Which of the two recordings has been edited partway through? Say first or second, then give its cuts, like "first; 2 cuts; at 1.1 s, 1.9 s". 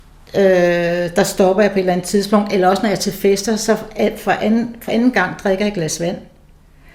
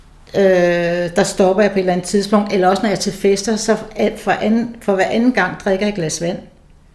first; 1 cut; at 4.9 s